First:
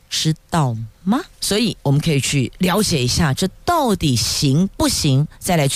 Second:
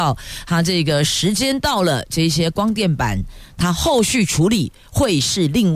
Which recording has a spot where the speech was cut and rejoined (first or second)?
first